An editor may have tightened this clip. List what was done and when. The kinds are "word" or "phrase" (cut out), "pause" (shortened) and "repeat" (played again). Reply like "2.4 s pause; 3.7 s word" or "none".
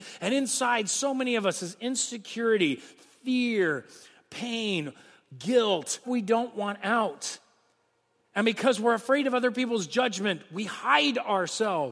6.0 s word